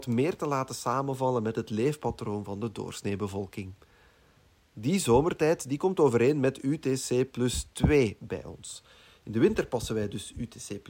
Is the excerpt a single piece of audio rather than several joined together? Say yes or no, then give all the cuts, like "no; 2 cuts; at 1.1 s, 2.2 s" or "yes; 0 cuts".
yes; 0 cuts